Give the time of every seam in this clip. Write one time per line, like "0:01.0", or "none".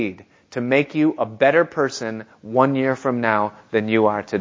none